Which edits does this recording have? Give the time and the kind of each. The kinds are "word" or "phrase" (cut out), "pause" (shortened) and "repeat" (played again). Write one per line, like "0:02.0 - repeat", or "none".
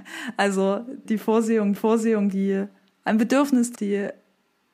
0:01.0 - word
0:01.7 - repeat
0:03.7 - word